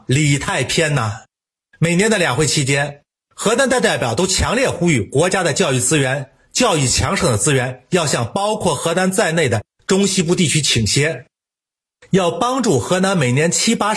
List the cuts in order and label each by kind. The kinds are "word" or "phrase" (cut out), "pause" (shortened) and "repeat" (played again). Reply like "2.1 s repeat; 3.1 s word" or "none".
1.3 s pause